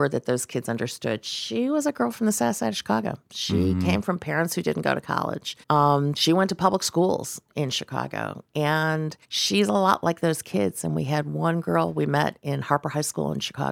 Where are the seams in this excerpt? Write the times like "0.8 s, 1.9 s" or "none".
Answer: 5.6 s, 9.2 s

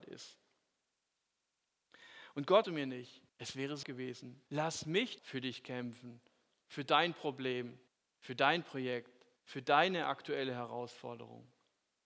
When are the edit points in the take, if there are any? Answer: 2.6 s, 3.3 s, 3.8 s, 4.5 s, 5.2 s, 7.9 s, 9.4 s

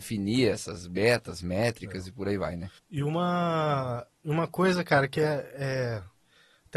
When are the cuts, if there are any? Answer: 2.8 s

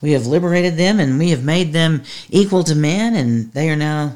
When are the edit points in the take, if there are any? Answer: none

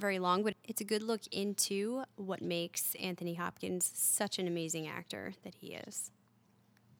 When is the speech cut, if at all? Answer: none

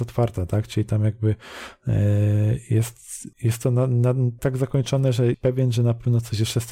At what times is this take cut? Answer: 3.3 s, 4.4 s, 5.3 s

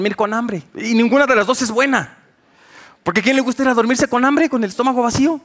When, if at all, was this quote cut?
none

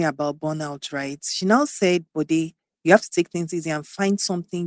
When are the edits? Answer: none

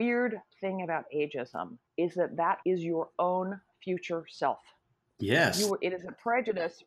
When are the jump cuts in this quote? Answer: 1.9 s, 2.6 s

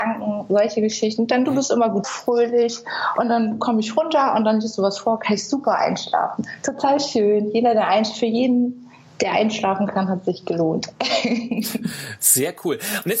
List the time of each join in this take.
2.0 s

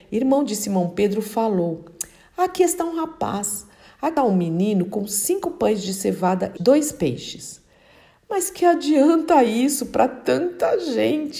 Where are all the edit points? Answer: 4.2 s, 6.6 s

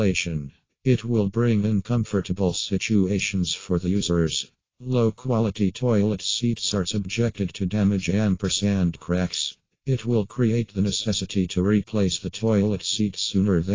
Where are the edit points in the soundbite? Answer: none

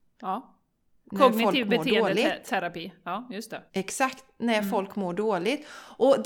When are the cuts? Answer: 3.7 s

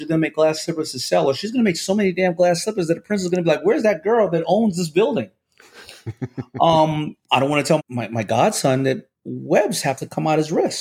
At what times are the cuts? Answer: 7.2 s, 7.8 s

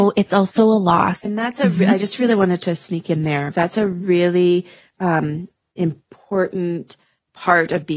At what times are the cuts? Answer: 3.5 s

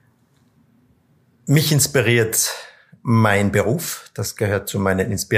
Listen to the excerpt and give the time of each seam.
none

